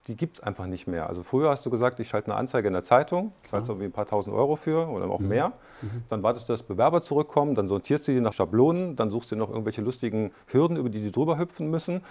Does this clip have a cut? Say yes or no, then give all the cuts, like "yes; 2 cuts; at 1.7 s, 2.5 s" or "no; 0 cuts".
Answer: yes; 1 cut; at 8.3 s